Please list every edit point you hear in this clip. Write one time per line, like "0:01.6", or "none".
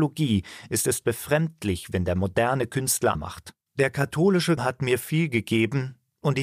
0:01.0
0:03.1
0:03.6
0:04.6